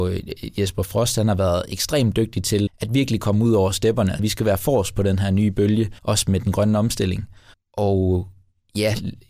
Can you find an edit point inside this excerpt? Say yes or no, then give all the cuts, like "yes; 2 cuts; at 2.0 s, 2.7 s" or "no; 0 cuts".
yes; 4 cuts; at 2.7 s, 4.2 s, 6.0 s, 7.5 s